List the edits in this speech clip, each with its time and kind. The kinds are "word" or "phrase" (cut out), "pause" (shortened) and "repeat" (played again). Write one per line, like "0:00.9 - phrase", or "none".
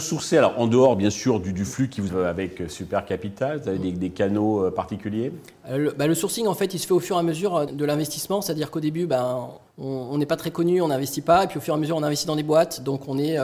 0:02.1 - word
0:07.7 - word
0:09.7 - pause